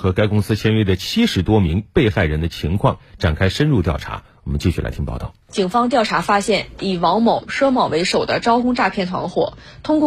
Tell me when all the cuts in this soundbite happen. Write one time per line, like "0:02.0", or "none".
0:05.4
0:07.5